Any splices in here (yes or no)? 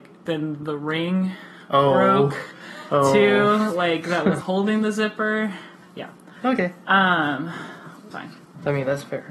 yes